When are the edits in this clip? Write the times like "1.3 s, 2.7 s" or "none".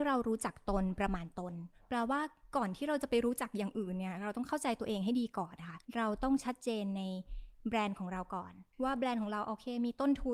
5.8 s, 8.7 s

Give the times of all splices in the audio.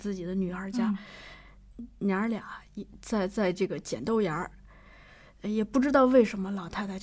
none

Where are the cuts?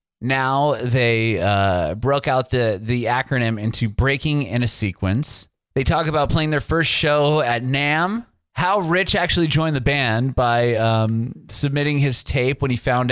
none

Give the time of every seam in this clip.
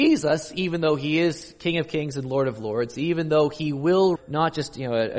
4.2 s

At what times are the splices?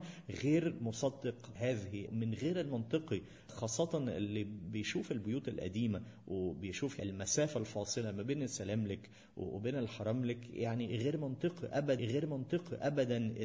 2.1 s, 12.0 s

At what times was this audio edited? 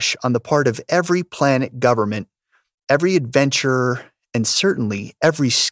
none

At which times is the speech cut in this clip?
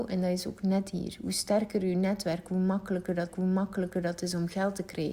3.3 s

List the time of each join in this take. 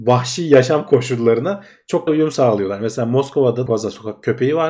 2.1 s, 3.7 s

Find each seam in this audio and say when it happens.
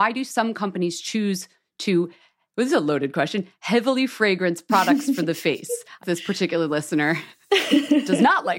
6.0 s

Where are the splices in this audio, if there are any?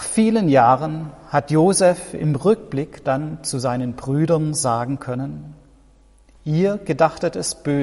none

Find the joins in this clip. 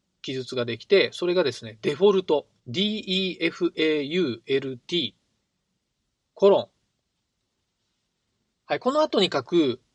2.6 s

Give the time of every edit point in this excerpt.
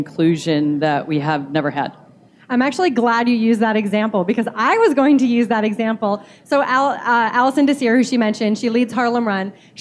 none

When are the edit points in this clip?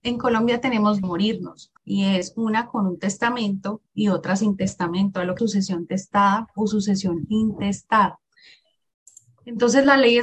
1.0 s, 1.8 s, 5.4 s

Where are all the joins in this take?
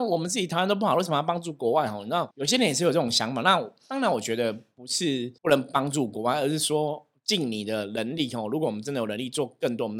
2.3 s, 5.4 s

